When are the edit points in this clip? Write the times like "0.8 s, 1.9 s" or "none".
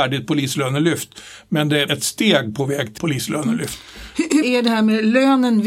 1.9 s, 3.0 s, 4.4 s